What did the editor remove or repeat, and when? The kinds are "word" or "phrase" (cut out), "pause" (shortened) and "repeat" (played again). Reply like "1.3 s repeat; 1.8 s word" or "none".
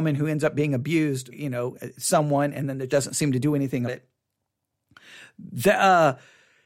1.3 s word; 2.9 s word; 3.9 s word